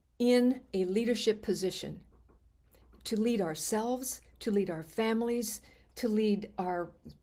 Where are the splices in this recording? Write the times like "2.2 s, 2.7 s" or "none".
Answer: none